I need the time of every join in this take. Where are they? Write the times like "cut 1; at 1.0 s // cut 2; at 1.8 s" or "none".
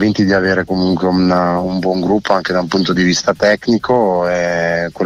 none